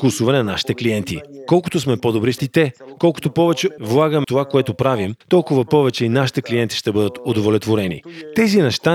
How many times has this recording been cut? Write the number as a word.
five